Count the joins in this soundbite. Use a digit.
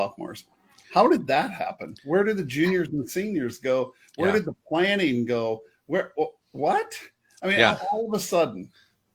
0